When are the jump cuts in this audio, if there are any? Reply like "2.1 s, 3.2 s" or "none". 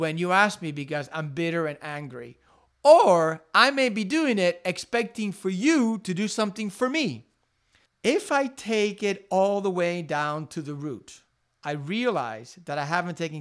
7.9 s